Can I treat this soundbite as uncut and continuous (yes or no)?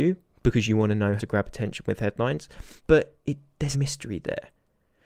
no